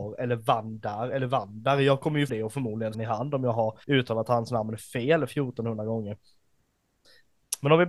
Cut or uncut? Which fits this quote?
cut